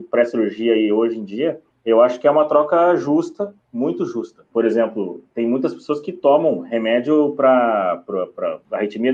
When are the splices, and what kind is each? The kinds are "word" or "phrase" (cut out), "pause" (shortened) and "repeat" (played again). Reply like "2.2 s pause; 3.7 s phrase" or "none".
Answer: none